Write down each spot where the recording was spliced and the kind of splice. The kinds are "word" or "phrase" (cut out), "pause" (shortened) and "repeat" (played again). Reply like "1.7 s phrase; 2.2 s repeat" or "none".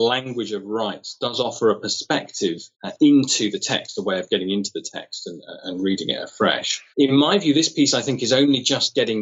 2.7 s pause; 6.9 s pause